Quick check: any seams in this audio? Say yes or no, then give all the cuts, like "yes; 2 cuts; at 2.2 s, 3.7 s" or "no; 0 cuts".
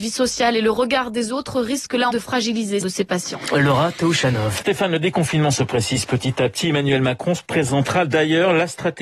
yes; 3 cuts; at 2.1 s, 2.8 s, 4.6 s